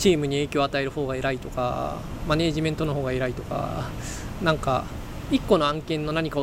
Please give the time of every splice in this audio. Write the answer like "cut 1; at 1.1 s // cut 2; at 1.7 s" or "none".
cut 1; at 4.4 s